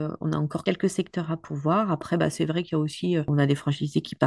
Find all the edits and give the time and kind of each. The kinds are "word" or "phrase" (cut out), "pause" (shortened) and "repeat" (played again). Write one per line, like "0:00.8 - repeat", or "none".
none